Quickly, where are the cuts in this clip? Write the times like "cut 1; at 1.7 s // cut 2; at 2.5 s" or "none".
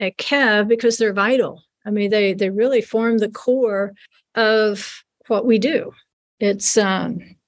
none